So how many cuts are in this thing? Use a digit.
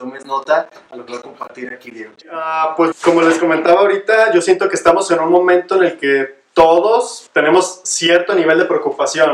4